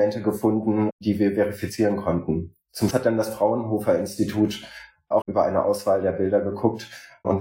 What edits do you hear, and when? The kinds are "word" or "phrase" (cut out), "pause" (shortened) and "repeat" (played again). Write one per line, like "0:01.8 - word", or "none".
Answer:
0:02.9 - word
0:05.2 - word